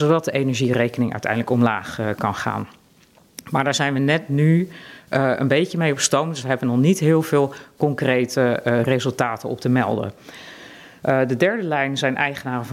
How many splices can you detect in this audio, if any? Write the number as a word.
zero